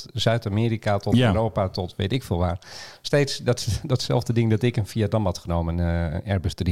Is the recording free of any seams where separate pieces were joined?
yes; 0 cuts

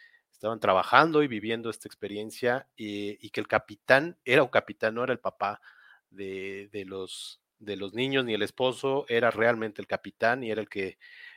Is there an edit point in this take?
no; 0 cuts

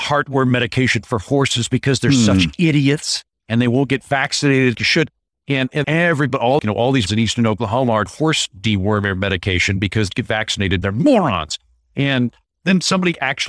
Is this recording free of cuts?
no; 7 cuts; at 4.7 s, 5.8 s, 6.6 s, 7.1 s, 8.1 s, 10.1 s, 10.8 s

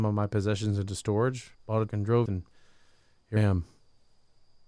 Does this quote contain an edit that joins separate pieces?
yes; 4 cuts; at 1.5 s, 1.9 s, 2.3 s, 3.4 s

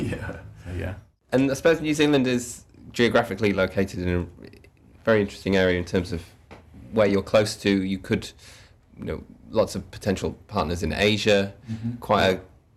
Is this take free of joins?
yes; 0 cuts

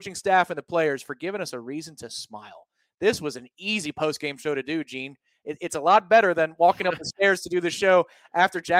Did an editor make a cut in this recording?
no; 0 cuts

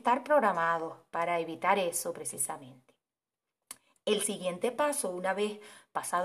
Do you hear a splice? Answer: no; 0 cuts

